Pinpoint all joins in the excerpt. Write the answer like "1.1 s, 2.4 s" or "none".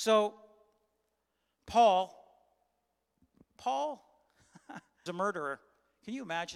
5.1 s